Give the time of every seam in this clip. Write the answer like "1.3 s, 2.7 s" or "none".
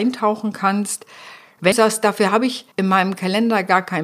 1.7 s, 2.7 s